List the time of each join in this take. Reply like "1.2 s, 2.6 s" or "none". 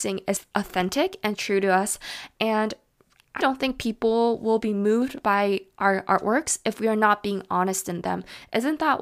3.4 s